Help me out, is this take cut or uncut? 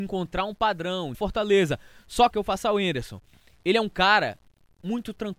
cut